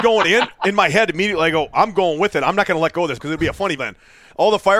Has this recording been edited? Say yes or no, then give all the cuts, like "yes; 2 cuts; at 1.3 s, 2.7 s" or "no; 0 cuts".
yes; 2 cuts; at 3.2 s, 3.8 s